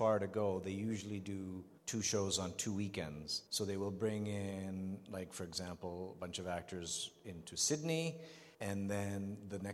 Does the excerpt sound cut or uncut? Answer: cut